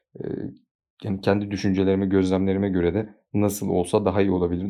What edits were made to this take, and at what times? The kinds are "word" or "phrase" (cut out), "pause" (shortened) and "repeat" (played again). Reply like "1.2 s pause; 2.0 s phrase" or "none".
none